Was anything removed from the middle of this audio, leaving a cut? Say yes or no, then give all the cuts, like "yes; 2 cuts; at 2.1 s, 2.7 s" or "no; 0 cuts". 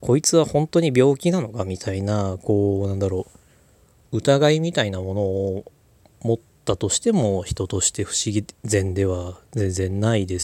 no; 0 cuts